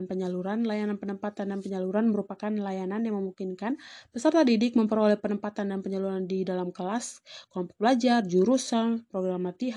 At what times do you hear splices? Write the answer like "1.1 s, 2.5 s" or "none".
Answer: none